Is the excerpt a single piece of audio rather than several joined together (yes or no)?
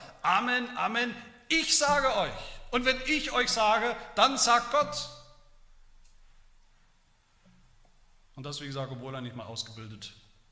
yes